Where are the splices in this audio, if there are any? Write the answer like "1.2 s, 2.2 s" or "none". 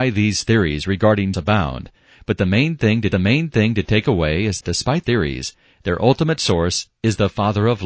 1.3 s, 3.1 s, 4.6 s, 5.0 s